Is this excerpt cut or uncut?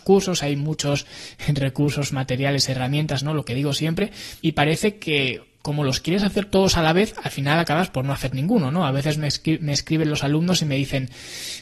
cut